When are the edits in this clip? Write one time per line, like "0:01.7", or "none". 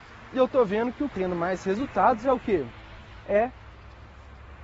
0:01.1